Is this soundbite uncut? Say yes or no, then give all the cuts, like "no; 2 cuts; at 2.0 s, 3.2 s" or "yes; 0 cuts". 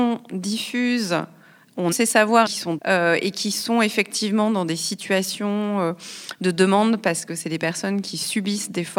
no; 3 cuts; at 1.9 s, 2.5 s, 2.8 s